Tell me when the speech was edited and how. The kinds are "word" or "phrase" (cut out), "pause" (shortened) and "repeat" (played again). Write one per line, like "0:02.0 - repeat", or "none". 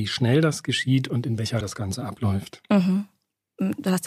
0:01.6 - word